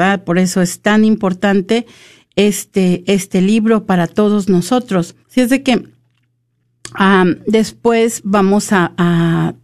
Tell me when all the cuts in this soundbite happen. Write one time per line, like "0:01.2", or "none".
0:05.2